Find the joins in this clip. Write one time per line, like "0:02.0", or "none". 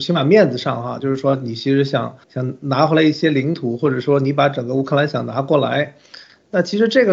0:02.2